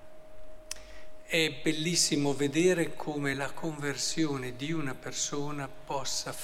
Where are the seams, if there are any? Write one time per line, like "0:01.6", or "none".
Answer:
none